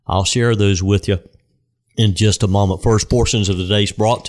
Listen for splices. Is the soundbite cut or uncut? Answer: uncut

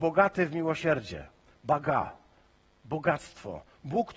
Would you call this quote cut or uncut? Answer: uncut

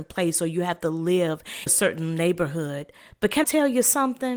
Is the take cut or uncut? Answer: cut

